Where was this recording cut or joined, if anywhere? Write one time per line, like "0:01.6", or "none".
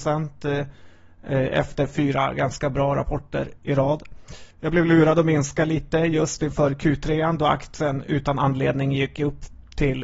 0:04.5